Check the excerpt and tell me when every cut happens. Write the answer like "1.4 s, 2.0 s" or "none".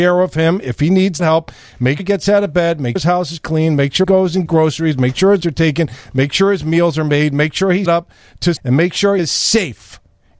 1.2 s, 2.0 s, 3.0 s, 4.0 s, 4.5 s, 5.4 s, 7.9 s, 8.6 s, 9.2 s